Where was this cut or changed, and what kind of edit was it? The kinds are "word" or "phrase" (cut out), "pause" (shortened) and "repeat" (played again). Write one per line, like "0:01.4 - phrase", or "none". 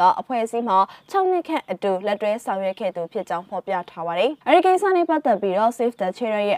0:04.4 - pause